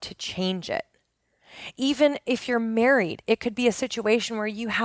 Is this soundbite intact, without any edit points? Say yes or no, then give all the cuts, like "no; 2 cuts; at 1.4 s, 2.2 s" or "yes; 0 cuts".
yes; 0 cuts